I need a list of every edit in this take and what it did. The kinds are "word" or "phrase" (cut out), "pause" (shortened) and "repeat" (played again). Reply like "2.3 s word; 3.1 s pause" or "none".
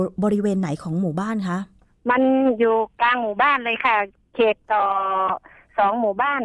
none